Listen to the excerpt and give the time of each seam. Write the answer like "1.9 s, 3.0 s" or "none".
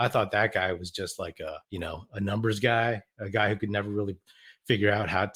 1.6 s